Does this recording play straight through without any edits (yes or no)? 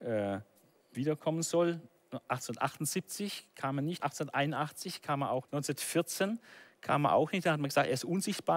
no